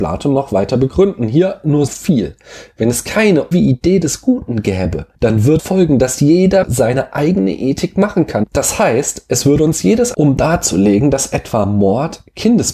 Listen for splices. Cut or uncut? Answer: cut